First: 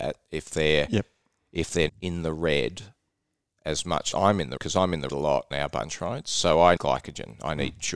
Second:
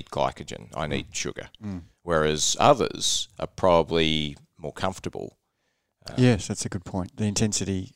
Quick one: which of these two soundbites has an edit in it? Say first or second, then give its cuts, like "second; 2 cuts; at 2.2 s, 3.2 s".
first; 6 cuts; at 1.9 s, 4.1 s, 4.6 s, 5.1 s, 5.5 s, 6.8 s